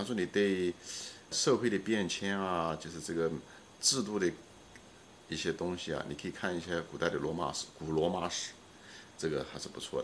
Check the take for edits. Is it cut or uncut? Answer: cut